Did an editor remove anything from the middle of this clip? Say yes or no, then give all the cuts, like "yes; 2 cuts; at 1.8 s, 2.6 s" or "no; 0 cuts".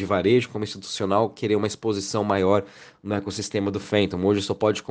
no; 0 cuts